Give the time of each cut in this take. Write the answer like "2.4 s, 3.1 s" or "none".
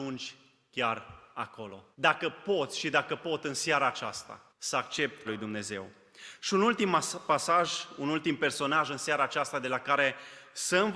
1.9 s, 4.5 s, 5.3 s